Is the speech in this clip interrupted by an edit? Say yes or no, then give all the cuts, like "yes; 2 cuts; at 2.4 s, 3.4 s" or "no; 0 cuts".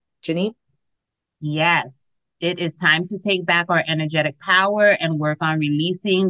no; 0 cuts